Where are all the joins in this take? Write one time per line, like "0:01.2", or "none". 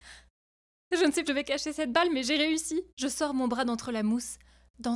0:01.2
0:02.9

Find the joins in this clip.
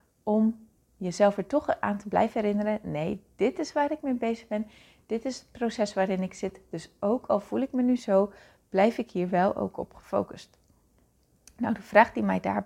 none

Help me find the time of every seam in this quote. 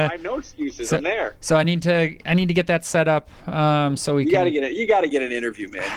none

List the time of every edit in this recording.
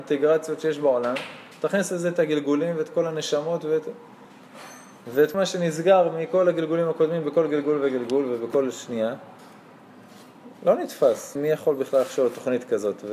0:05.3
0:11.4

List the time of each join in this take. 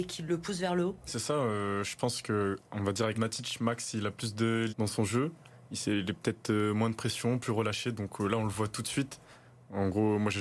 0:01.1
0:03.1
0:04.7

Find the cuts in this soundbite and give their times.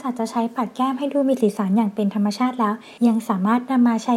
0:03.0

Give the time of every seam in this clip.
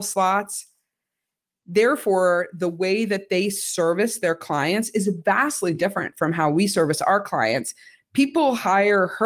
none

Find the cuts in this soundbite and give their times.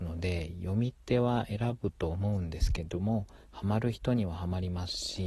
0:03.4

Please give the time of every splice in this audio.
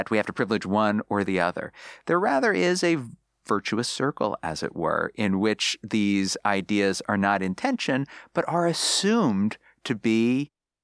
none

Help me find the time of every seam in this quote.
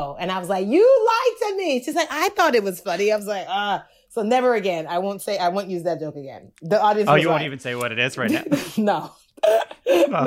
none

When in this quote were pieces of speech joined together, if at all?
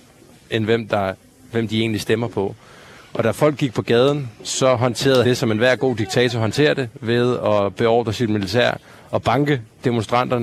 0:05.2

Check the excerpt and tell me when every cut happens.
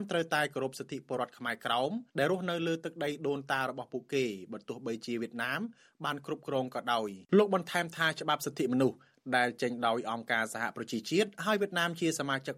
0:02.1
0:07.3

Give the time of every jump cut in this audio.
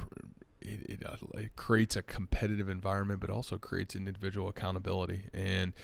none

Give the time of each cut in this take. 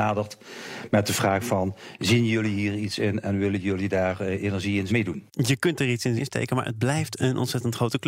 0:04.9
0:06.2

